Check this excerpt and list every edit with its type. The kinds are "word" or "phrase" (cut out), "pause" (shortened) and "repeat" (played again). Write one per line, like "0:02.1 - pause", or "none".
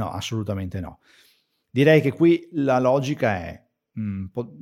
none